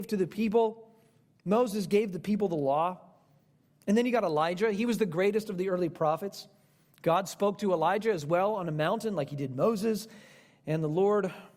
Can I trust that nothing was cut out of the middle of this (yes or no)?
yes